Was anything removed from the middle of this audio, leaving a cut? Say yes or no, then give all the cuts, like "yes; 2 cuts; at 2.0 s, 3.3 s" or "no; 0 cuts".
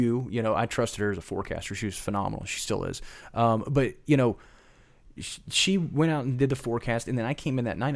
no; 0 cuts